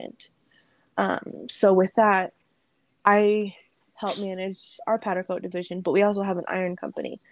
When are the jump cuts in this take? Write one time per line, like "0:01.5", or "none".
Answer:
none